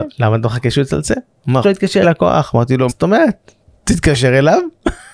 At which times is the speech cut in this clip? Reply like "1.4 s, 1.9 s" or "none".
1.6 s, 2.0 s, 2.9 s